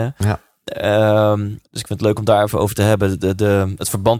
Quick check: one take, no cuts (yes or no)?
no